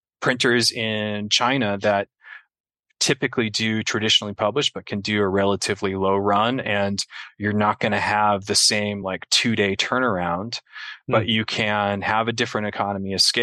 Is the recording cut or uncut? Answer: uncut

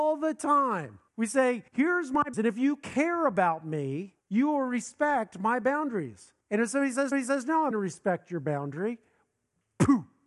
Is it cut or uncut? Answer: cut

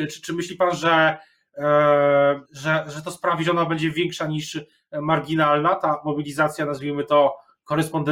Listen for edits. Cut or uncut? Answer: cut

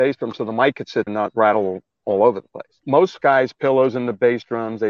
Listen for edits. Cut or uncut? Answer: cut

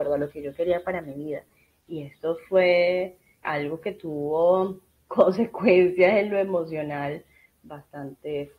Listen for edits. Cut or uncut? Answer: uncut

